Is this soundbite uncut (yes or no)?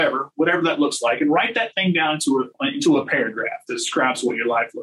no